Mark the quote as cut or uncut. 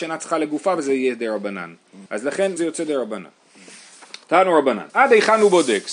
cut